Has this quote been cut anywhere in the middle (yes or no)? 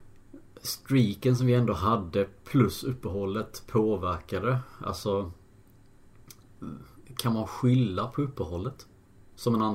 no